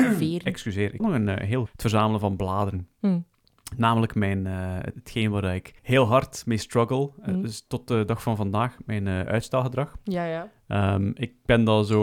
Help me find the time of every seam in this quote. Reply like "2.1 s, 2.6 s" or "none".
1.0 s, 1.7 s, 4.9 s, 5.8 s